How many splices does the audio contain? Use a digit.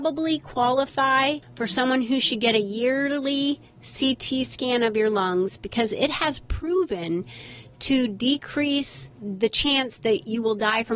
1